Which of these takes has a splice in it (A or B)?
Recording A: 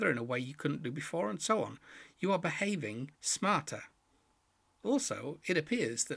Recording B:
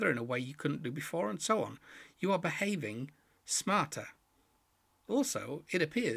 A